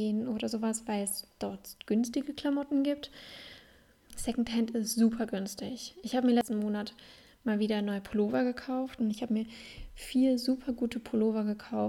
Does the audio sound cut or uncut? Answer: uncut